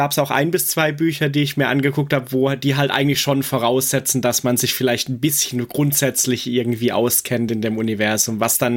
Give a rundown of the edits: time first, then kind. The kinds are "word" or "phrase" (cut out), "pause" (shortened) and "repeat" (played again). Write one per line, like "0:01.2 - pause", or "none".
none